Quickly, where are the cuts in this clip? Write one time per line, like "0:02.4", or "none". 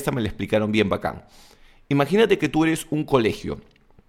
none